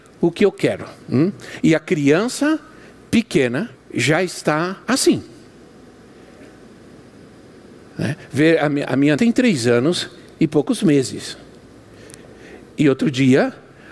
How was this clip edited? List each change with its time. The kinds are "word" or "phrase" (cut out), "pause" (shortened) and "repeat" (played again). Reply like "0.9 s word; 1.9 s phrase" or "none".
1.0 s pause; 3.7 s pause; 4.8 s pause; 9.2 s word